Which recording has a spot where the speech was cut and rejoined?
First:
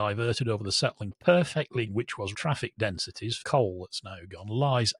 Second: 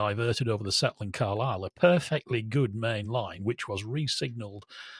first; 4 cuts; at 1.1 s, 1.9 s, 2.3 s, 3.4 s

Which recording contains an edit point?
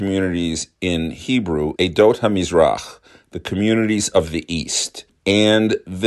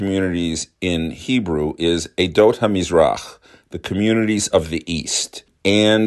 first; 1 cut; at 1.8 s

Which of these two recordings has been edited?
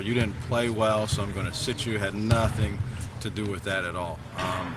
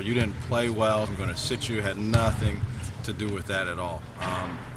second; 1 cut; at 1.1 s

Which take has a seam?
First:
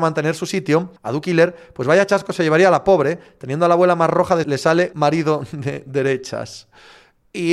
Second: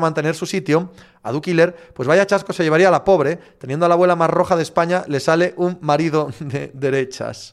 first; 3 cuts; at 1.0 s, 4.4 s, 4.9 s

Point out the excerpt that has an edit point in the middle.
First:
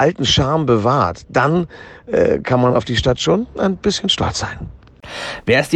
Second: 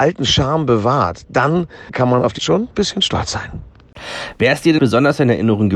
second; 4 cuts; at 1.9 s, 2.4 s, 2.7 s, 4.8 s

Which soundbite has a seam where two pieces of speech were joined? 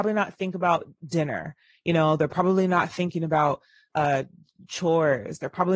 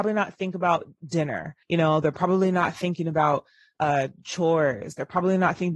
second; 2 cuts; at 1.6 s, 4.2 s

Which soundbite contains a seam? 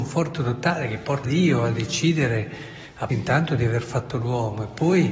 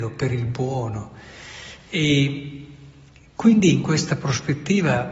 first; 2 cuts; at 1.2 s, 3.1 s

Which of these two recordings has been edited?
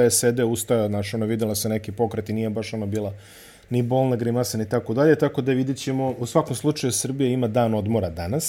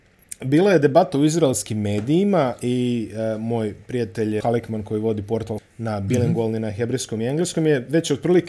second; 2 cuts; at 4.4 s, 5.6 s

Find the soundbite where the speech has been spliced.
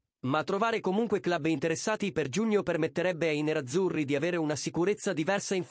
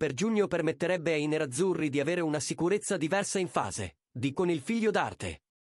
second; 1 cut; at 4.3 s

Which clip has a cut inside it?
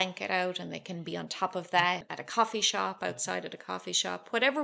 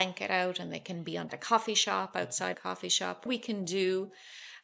second; 3 cuts; at 1.3 s, 2.5 s, 3.3 s

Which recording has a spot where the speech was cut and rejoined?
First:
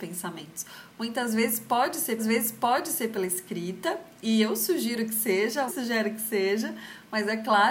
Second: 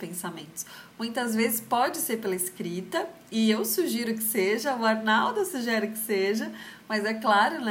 first; 2 cuts; at 2.2 s, 5.7 s

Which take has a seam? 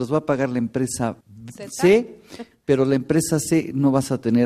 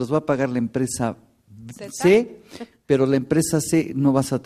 first; 1 cut; at 1.2 s

